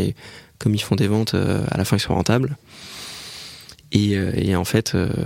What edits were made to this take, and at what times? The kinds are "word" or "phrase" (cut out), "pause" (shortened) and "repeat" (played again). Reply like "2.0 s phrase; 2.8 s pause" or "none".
none